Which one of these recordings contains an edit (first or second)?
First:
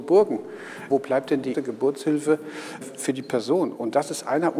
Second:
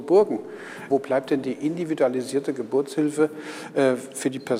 first